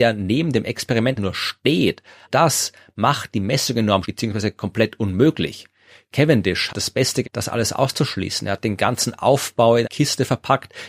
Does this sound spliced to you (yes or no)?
yes